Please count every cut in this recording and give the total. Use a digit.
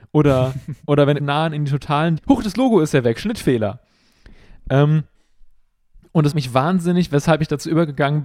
3